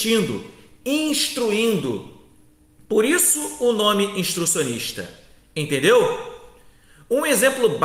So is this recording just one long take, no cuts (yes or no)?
yes